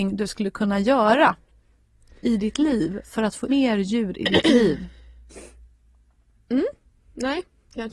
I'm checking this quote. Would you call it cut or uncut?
cut